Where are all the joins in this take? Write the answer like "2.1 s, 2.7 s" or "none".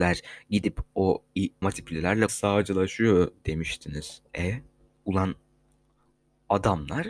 1.6 s, 2.3 s, 4.3 s